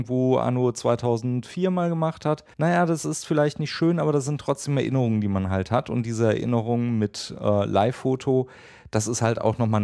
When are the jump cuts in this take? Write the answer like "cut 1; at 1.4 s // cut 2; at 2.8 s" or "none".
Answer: cut 1; at 2.5 s